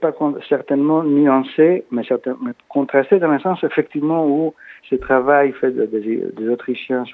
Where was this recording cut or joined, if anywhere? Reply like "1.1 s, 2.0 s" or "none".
4.8 s